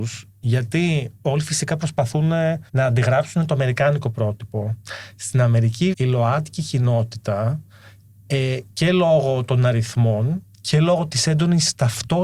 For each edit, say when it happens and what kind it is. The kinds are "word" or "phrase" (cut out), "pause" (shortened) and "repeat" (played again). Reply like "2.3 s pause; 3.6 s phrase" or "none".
2.7 s pause; 5.9 s word; 10.5 s pause